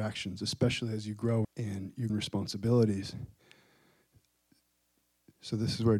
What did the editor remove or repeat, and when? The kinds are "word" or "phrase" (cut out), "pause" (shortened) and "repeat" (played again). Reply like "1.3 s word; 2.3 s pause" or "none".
1.4 s phrase; 2.1 s word